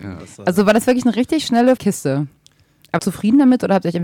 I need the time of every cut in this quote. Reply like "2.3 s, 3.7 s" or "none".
1.8 s, 3.0 s